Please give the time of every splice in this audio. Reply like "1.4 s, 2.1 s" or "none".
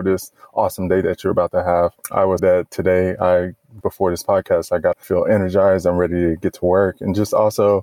2.4 s, 3.8 s, 4.9 s